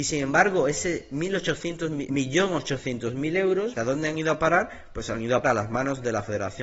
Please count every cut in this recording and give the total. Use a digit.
3